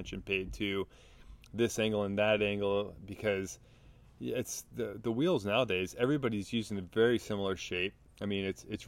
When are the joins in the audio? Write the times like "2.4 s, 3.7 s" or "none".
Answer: none